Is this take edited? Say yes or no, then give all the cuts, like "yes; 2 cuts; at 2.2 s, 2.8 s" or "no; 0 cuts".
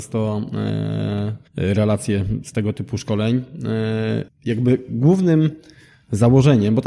yes; 2 cuts; at 1.5 s, 4.3 s